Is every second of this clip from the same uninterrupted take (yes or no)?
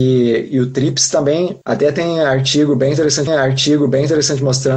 no